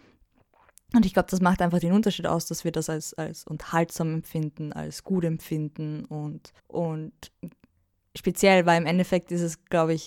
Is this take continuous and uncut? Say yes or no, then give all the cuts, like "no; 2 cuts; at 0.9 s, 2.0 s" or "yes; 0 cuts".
no; 1 cut; at 6.6 s